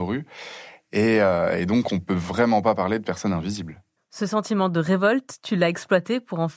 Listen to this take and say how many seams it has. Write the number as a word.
one